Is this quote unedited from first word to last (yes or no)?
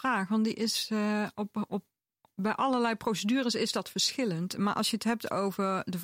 yes